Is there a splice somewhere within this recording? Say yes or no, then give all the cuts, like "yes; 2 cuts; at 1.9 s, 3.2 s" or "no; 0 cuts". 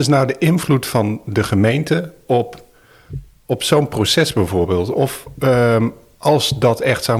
no; 0 cuts